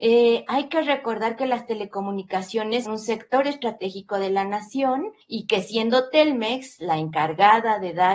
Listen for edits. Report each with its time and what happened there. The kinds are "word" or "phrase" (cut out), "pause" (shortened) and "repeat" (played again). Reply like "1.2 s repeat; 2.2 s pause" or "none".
2.9 s word; 5.2 s pause